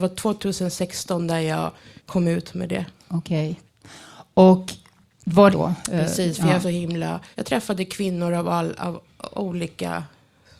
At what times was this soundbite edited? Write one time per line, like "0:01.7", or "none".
0:02.0
0:03.0
0:05.5
0:06.6
0:07.3